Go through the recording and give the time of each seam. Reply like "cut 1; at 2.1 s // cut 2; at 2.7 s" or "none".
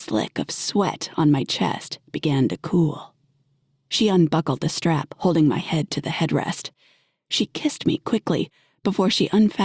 none